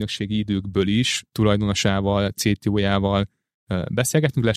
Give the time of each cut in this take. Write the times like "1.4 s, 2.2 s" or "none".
1.3 s